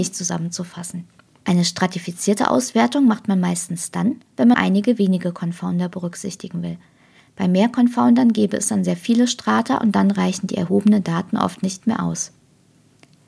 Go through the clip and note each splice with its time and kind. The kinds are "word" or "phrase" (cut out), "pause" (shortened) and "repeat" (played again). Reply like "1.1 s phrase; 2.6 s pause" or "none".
4.5 s word